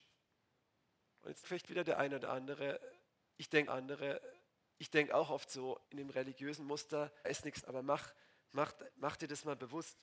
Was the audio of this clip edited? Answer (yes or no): yes